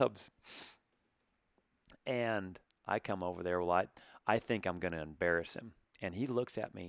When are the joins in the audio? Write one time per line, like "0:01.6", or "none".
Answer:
none